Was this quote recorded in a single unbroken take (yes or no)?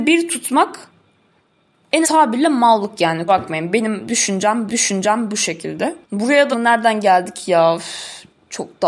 no